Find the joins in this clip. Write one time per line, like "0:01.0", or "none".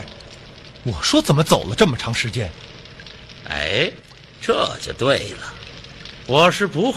none